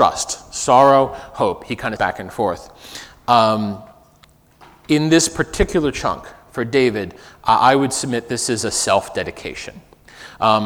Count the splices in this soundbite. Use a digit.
1